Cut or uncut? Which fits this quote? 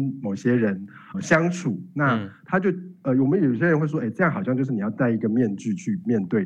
cut